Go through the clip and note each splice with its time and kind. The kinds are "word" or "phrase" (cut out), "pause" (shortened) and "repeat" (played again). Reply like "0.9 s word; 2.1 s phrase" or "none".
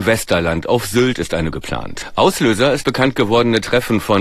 1.5 s word; 2.8 s word

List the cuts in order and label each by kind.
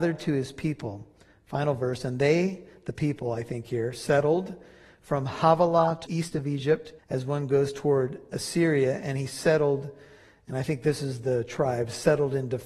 6.0 s phrase; 7.0 s pause

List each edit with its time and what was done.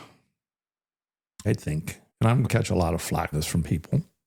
1.4 s word; 2.1 s pause; 2.4 s word; 3.3 s word

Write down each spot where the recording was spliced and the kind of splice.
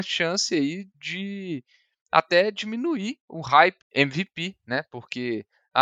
0.9 s pause; 3.8 s phrase

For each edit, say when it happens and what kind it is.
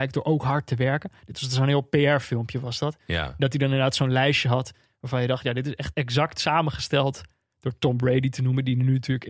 none

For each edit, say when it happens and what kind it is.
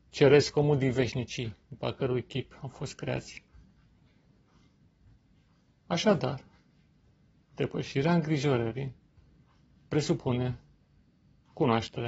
none

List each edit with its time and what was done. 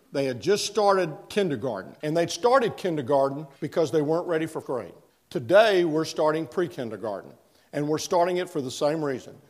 3.6 s pause; 4.6 s word

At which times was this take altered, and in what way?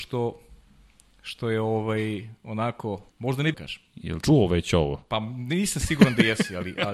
3.1 s pause; 3.5 s phrase; 4.2 s word

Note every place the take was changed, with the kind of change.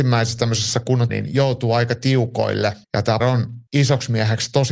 1.1 s word; 2.8 s pause; 3.2 s word; 3.7 s pause

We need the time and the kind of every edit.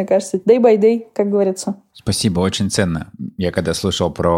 none

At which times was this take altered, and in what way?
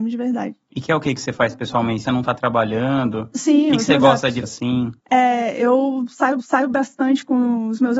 2.0 s phrase; 4.4 s word; 5.0 s pause; 6.4 s repeat

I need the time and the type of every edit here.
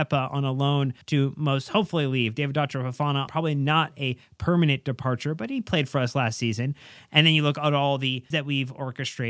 1.0 s pause; 3.3 s phrase; 8.3 s word

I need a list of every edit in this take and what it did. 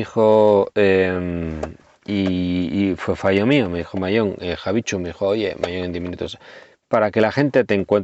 none

